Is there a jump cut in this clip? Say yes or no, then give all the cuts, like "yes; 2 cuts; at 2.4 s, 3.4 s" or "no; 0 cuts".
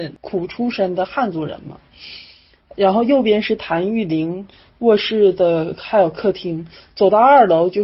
no; 0 cuts